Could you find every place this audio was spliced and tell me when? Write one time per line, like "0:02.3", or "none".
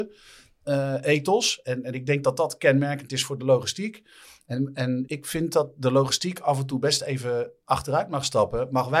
0:05.1